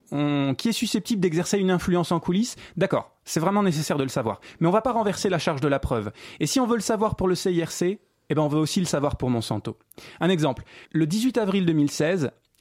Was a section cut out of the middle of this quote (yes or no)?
yes